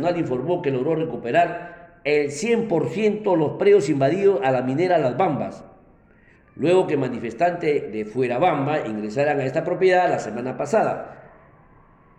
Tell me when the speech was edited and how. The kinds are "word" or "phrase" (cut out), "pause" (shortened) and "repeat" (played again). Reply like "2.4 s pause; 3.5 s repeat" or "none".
none